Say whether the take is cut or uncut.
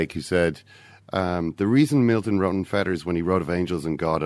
uncut